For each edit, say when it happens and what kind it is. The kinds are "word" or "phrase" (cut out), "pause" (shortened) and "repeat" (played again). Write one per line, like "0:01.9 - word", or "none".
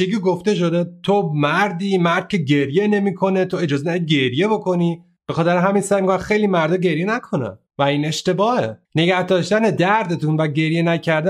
0:08.8 - pause